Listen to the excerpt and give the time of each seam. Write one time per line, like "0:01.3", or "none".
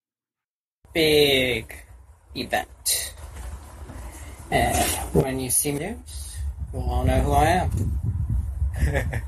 0:05.8